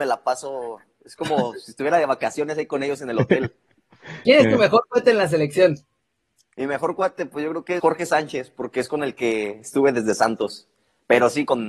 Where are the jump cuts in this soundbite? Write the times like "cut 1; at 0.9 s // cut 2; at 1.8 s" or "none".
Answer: cut 1; at 7.8 s